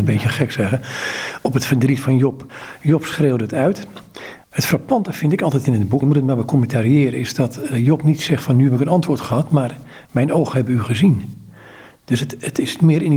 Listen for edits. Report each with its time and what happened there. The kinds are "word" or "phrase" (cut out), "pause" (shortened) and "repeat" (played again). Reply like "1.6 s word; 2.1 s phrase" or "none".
4.4 s pause; 6.0 s word